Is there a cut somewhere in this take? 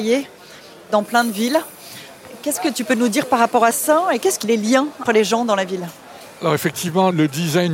yes; 2 cuts; at 4.4 s, 5.1 s

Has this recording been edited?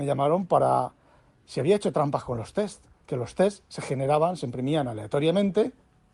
no; 0 cuts

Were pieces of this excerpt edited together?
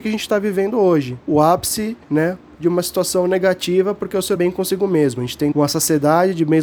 yes; 5 cuts; at 1.2 s, 2.0 s, 2.5 s, 4.4 s, 5.5 s

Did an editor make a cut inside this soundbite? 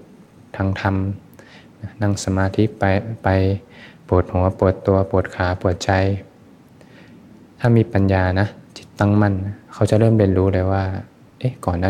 yes; 2 cuts; at 8.7 s, 9.6 s

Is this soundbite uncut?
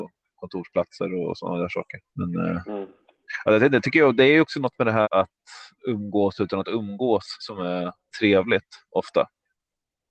no; 3 cuts; at 2.1 s, 5.0 s, 8.1 s

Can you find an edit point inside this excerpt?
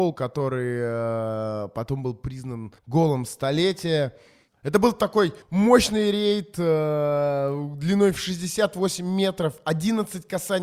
yes; 2 cuts; at 2.8 s, 5.4 s

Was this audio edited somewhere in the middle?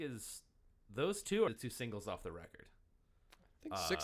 yes; 1 cut; at 1.5 s

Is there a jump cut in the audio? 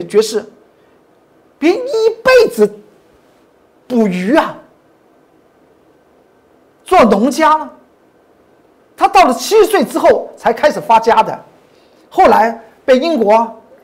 no; 0 cuts

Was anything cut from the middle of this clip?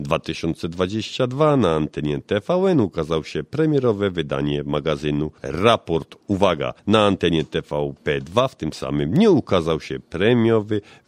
yes; 3 cuts; at 5.4 s, 6.8 s, 8.0 s

